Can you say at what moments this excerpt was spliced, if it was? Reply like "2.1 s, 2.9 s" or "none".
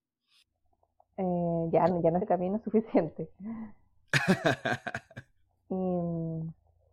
2.2 s